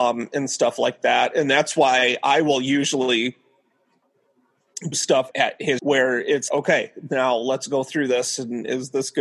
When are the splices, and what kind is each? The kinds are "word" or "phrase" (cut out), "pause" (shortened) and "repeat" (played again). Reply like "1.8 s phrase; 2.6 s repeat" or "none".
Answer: 4.9 s word; 5.3 s word; 5.8 s word; 6.5 s word

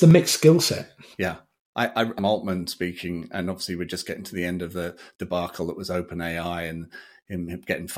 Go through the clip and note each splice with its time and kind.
2.2 s phrase

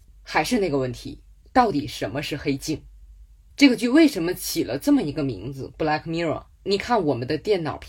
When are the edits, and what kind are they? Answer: 1.4 s pause; 6.5 s pause

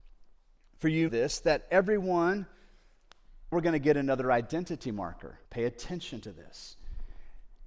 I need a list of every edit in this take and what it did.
1.1 s phrase; 3.5 s word; 5.4 s pause

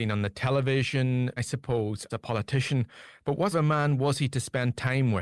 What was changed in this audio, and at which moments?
1.4 s word; 2.1 s word; 3.5 s word

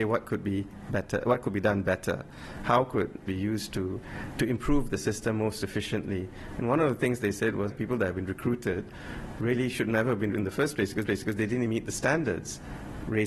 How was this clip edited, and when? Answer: 3.3 s phrase; 7.7 s phrase; 10.3 s word; 11.1 s repeat; 11.7 s word

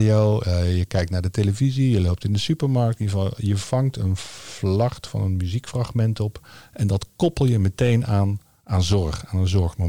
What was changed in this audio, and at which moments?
none

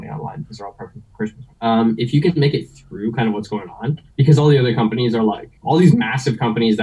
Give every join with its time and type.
1.5 s pause; 4.1 s pause; 5.6 s pause

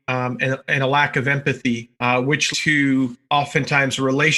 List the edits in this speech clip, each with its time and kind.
1.9 s pause; 2.5 s word; 3.2 s pause

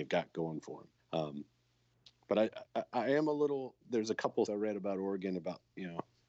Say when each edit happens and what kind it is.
1.0 s pause; 2.7 s pause; 3.8 s word; 4.5 s word

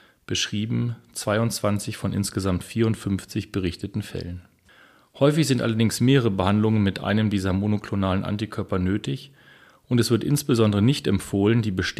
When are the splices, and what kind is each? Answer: none

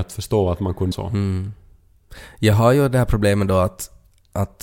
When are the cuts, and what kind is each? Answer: 0.9 s word

